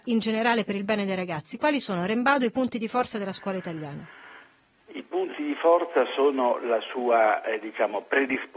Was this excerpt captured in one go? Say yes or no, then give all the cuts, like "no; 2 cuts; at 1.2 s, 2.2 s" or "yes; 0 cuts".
yes; 0 cuts